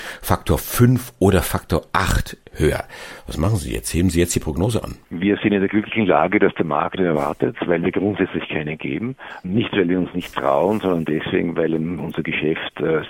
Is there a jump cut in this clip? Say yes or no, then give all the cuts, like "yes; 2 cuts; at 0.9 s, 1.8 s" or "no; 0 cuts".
yes; 2 cuts; at 5.0 s, 7.0 s